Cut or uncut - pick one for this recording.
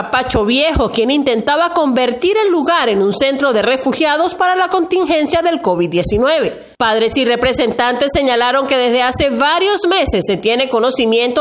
uncut